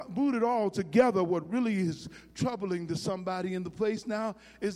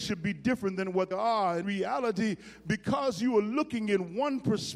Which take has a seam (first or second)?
second